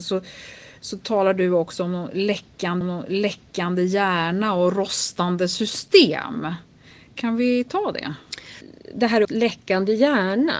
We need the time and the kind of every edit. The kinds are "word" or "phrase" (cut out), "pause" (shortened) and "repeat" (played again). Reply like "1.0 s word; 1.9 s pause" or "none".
2.8 s repeat; 9.2 s word